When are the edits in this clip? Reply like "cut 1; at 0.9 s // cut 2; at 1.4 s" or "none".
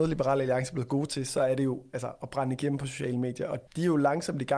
cut 1; at 3.7 s